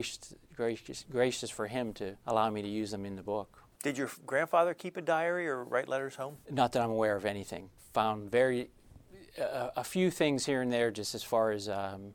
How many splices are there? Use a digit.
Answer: 2